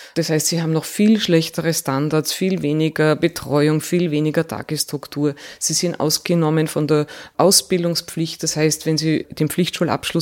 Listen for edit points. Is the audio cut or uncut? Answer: uncut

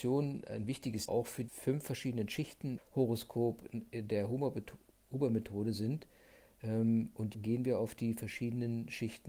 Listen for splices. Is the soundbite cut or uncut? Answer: cut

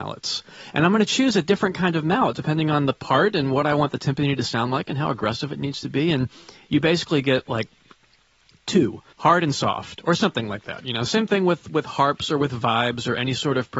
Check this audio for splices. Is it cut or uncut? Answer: cut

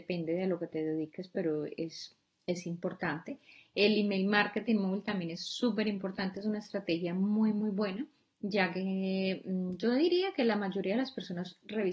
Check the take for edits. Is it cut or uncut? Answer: uncut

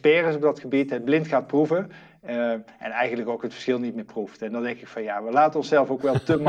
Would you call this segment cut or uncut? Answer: uncut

